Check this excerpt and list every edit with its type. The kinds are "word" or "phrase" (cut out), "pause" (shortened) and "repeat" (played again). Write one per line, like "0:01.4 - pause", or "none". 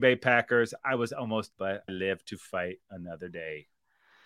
0:01.5 - word
0:01.9 - word

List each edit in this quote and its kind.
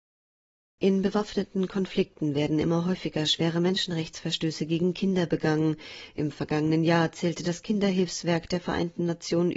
none

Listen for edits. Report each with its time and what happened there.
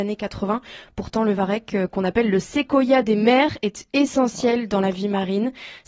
none

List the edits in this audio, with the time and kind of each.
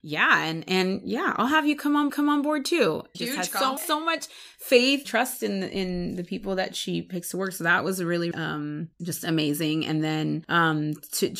0:02.1 - repeat
0:03.1 - phrase
0:03.8 - phrase
0:05.0 - word
0:08.3 - word
0:08.9 - pause

